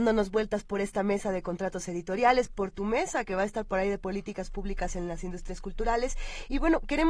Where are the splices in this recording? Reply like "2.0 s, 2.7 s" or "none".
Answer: none